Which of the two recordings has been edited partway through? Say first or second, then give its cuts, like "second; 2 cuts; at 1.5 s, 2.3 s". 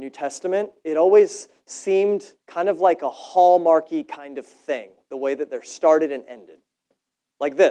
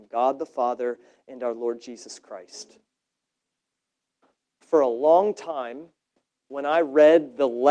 first; 1 cut; at 2.4 s